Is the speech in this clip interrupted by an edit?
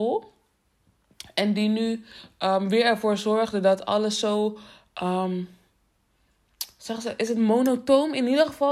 no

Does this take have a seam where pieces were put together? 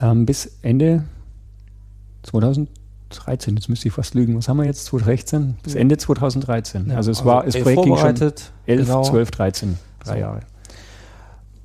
no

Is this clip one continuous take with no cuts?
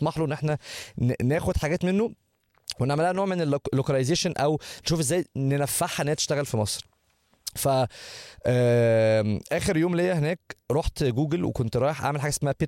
no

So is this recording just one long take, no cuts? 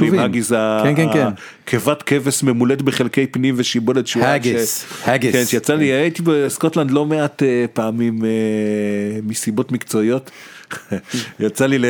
yes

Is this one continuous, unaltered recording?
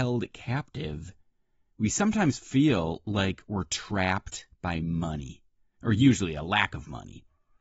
yes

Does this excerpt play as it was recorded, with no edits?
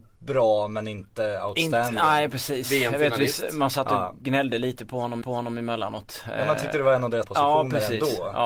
no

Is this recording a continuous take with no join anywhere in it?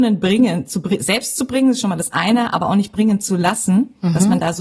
yes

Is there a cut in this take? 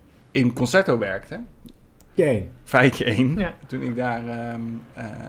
yes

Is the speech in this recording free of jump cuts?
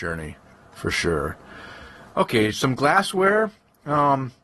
yes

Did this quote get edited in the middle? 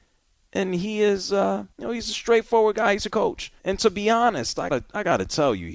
yes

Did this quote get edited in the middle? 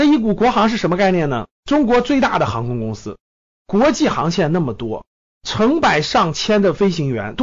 yes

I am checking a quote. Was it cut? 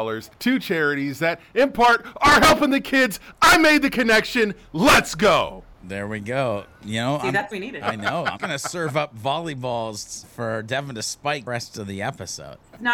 yes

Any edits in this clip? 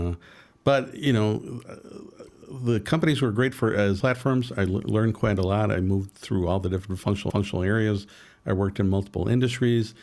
yes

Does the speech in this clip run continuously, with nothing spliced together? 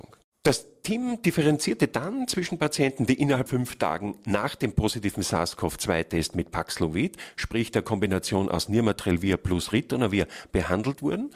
no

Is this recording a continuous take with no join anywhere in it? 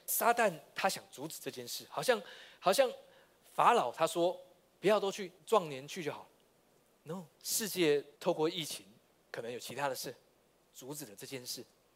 no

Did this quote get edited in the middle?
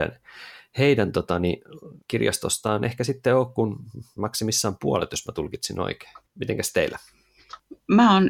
yes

